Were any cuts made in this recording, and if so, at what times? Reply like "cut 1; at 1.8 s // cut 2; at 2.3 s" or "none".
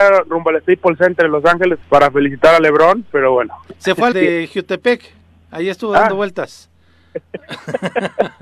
cut 1; at 1.8 s // cut 2; at 4.1 s